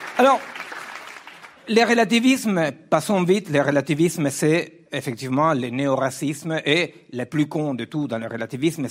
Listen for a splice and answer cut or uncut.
uncut